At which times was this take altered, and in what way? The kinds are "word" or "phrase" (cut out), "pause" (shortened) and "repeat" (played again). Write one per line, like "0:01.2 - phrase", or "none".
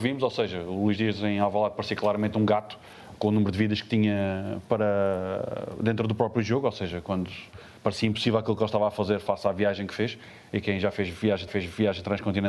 0:07.8 - pause
0:11.5 - repeat